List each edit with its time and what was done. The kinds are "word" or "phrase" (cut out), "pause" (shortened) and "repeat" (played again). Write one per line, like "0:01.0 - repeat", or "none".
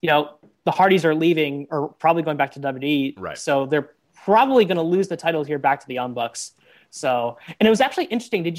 none